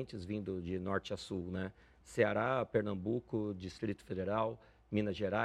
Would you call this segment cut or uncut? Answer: uncut